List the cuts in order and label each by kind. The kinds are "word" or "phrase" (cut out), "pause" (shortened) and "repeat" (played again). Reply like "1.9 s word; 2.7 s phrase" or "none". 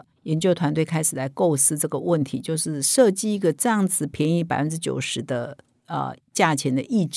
none